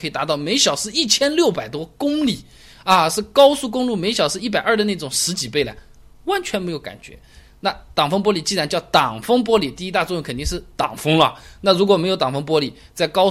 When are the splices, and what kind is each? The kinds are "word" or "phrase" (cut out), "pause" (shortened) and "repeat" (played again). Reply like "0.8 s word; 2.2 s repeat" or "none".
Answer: none